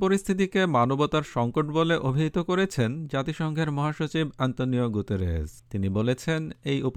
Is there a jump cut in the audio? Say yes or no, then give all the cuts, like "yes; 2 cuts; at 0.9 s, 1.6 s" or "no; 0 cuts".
yes; 1 cut; at 5.6 s